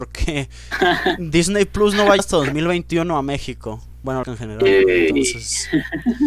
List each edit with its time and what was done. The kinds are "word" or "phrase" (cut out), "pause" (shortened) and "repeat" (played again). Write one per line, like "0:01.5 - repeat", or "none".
0:02.2 - word
0:04.2 - word